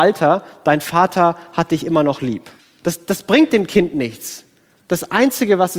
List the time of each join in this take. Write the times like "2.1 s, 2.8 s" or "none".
2.6 s